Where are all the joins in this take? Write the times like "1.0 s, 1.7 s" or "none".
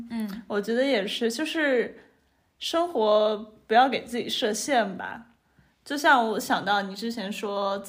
none